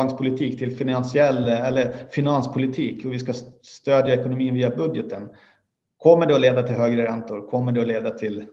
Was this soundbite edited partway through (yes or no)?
no